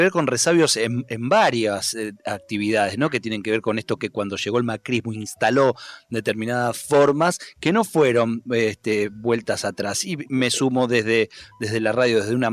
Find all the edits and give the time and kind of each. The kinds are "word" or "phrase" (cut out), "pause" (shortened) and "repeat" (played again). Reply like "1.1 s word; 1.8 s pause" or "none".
10.3 s word